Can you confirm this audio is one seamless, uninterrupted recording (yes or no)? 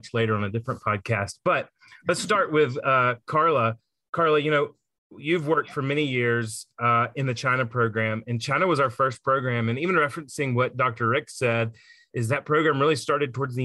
yes